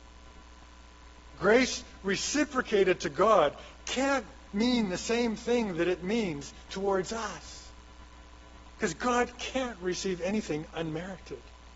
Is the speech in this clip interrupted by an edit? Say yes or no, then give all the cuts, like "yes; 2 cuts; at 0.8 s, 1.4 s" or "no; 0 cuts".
no; 0 cuts